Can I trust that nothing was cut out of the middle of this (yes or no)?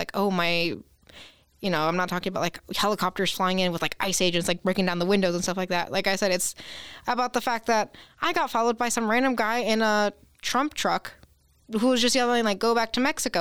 yes